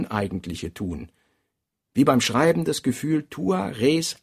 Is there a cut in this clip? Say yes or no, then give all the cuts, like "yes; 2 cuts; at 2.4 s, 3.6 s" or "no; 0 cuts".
no; 0 cuts